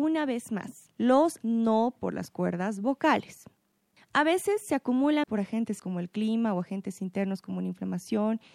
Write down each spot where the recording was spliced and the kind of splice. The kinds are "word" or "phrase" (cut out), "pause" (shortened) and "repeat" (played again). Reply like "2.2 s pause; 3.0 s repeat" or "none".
1.4 s word; 2.0 s word; 5.2 s word; 5.8 s word

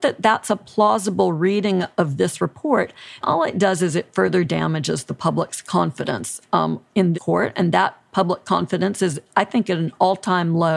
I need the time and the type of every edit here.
3.2 s word; 7.1 s word

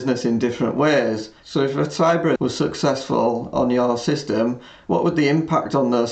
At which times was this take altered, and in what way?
1.4 s pause; 2.4 s word

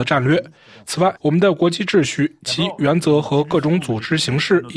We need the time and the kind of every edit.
1.2 s pause

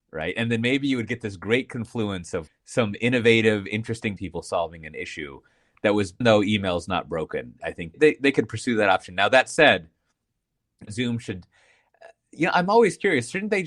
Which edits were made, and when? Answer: 2.5 s word; 4.2 s word; 6.2 s phrase; 7.6 s word; 7.9 s phrase; 10.9 s phrase

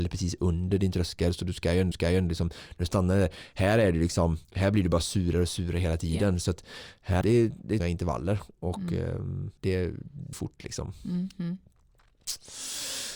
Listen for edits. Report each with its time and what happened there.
1.9 s repeat; 4.4 s pause; 7.2 s phrase; 7.8 s word; 9.6 s pause; 10.3 s word

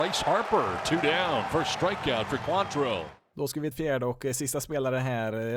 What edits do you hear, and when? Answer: 2.4 s word; 3.7 s phrase

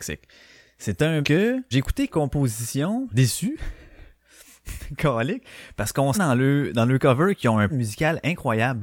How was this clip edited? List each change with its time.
1.2 s word; 1.7 s word; 2.1 s word; 3.1 s word; 6.1 s word; 7.7 s word

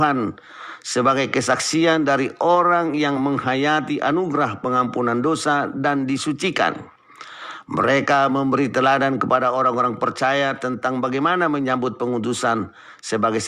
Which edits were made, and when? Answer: none

